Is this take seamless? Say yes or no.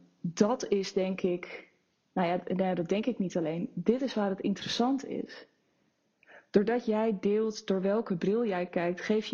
yes